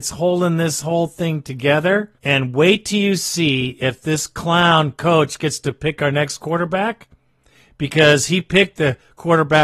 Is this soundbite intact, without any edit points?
no; 1 cut; at 2.2 s

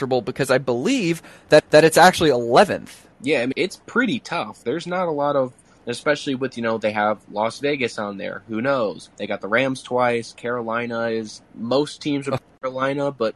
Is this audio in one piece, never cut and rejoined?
no; 6 cuts; at 1.6 s, 3.1 s, 3.5 s, 9.1 s, 11.4 s, 12.4 s

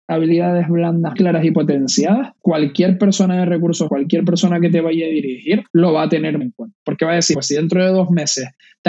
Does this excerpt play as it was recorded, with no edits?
no; 7 cuts; at 1.1 s, 1.5 s, 2.4 s, 3.9 s, 5.7 s, 6.4 s, 7.3 s

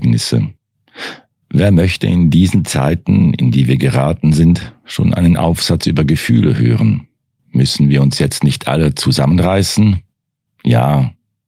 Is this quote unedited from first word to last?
yes; 0 cuts

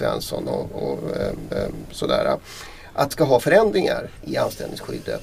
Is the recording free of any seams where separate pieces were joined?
no; 3 cuts; at 1.5 s, 3.1 s, 4.2 s

